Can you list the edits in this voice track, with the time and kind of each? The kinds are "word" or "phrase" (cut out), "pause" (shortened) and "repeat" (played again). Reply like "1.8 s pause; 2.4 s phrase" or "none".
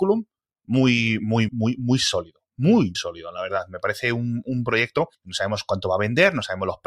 1.5 s word; 2.9 s word